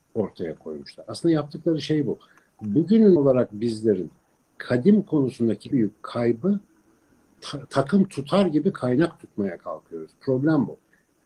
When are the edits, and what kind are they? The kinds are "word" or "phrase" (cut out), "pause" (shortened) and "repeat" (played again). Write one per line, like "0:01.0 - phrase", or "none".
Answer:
0:03.2 - word
0:05.7 - word
0:08.7 - word